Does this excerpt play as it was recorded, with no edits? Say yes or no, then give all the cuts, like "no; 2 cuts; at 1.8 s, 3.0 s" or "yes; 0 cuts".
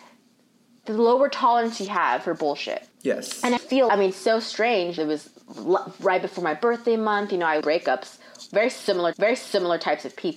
no; 6 cuts; at 2.9 s, 3.6 s, 3.9 s, 5.0 s, 7.6 s, 9.1 s